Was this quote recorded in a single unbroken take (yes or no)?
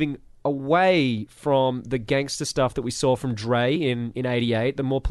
yes